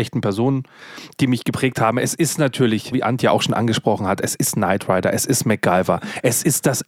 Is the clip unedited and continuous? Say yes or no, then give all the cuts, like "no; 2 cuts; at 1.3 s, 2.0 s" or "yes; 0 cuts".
no; 1 cut; at 2.9 s